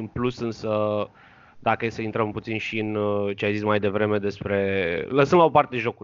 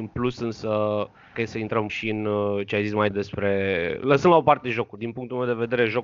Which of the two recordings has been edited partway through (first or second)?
second